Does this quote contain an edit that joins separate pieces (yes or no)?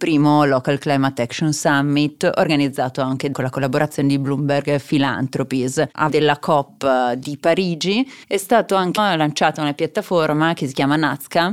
yes